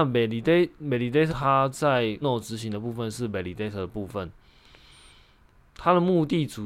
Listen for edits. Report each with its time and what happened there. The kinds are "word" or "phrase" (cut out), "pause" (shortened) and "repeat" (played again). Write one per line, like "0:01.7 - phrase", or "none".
0:01.3 - word
0:02.2 - word